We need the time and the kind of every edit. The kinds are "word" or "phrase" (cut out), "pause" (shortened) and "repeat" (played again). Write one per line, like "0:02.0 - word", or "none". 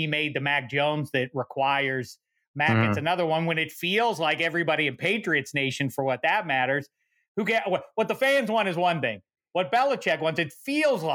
none